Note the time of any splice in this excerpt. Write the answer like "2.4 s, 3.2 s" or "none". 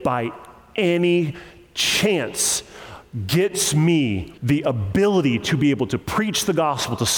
4.4 s